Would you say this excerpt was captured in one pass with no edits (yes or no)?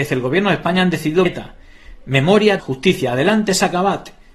no